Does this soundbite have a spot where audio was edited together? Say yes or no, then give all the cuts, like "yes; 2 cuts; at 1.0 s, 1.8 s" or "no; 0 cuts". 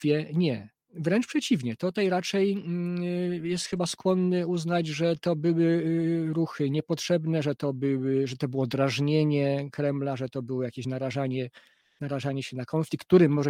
no; 0 cuts